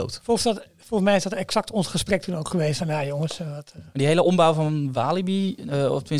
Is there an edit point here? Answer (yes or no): no